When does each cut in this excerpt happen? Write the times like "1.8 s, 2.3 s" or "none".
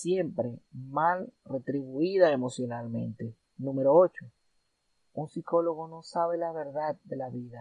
none